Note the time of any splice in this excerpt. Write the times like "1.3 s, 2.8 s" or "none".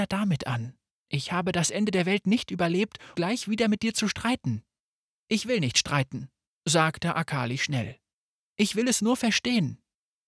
3.1 s